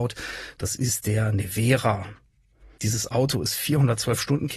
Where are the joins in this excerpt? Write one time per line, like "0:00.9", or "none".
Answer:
none